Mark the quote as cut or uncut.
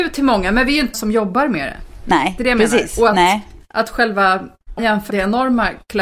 cut